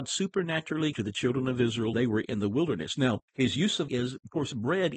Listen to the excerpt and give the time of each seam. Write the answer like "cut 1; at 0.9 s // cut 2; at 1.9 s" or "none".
cut 1; at 0.9 s // cut 2; at 1.9 s // cut 3; at 3.3 s // cut 4; at 3.9 s